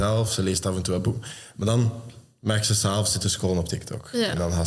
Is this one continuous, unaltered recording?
no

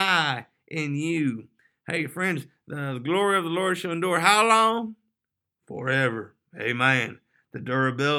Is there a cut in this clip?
no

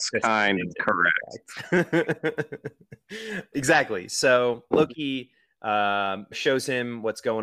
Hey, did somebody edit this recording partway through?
yes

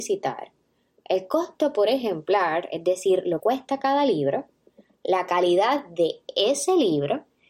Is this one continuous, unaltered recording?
no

